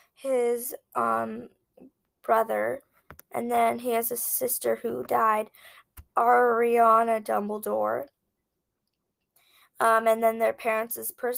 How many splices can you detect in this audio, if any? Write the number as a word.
zero